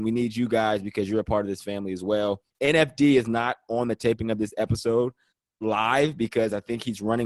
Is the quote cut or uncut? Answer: cut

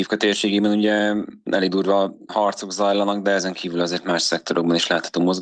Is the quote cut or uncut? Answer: uncut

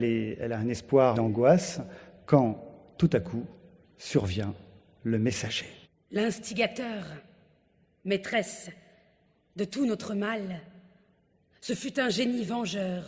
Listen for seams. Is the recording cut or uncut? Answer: cut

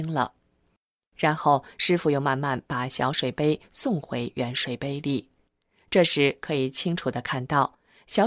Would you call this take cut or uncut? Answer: uncut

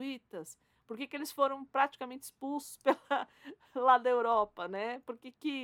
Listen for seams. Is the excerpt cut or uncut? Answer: uncut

